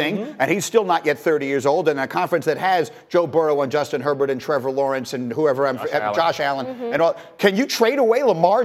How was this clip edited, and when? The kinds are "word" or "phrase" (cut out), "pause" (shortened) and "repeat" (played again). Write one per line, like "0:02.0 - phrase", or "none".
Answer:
none